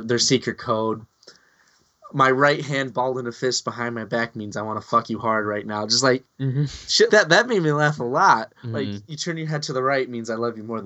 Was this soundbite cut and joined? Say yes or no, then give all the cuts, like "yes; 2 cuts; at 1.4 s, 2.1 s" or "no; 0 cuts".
yes; 2 cuts; at 6.3 s, 7.1 s